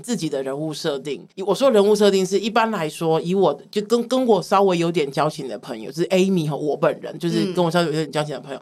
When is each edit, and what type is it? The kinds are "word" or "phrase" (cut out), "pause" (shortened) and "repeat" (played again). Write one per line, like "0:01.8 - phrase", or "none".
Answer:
0:01.3 - pause